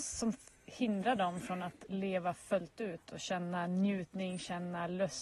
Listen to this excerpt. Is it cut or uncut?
uncut